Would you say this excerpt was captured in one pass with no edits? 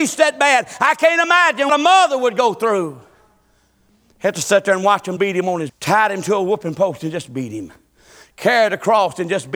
no; 3 cuts; at 1.7 s, 5.2 s, 5.7 s

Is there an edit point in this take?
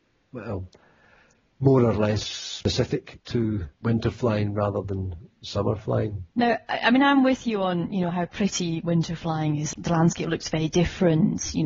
yes; 1 cut; at 6.3 s

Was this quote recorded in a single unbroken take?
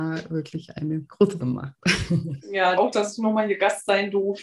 no; 2 cuts; at 1.4 s, 2.8 s

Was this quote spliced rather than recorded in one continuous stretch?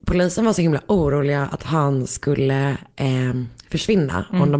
no; 0 cuts

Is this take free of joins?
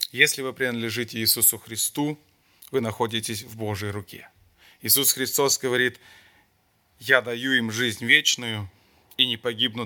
yes; 0 cuts

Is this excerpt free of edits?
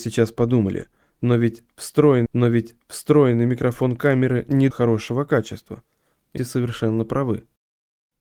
no; 3 cuts; at 2.3 s, 4.7 s, 6.4 s

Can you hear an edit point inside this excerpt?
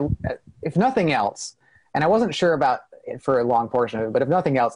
no; 0 cuts

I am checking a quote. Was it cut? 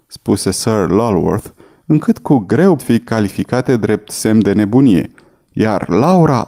yes; 1 cut; at 2.8 s

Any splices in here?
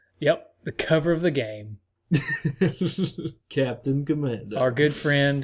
no; 0 cuts

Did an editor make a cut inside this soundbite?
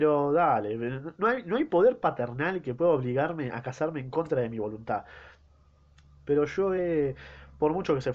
no; 0 cuts

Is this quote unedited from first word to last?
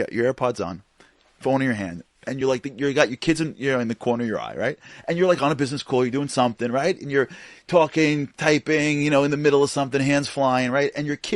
yes; 0 cuts

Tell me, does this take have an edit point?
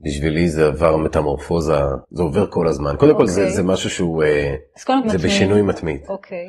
yes; 2 cuts; at 2.0 s, 5.0 s

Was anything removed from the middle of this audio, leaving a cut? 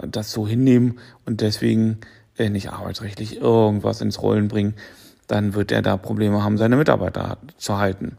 no; 0 cuts

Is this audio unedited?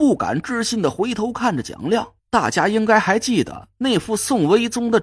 no; 1 cut; at 2.2 s

